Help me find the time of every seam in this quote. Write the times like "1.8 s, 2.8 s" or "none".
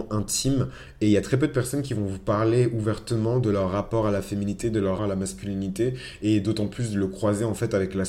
5.0 s